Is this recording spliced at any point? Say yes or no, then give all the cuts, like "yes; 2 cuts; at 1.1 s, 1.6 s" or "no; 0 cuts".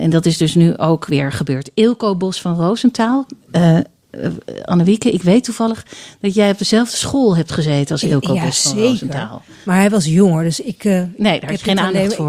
no; 0 cuts